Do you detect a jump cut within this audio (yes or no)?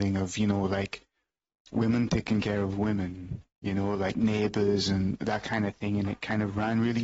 no